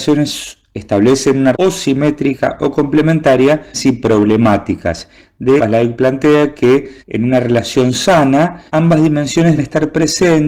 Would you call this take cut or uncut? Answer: cut